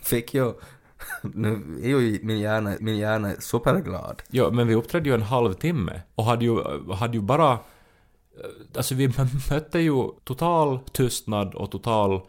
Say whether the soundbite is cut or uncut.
cut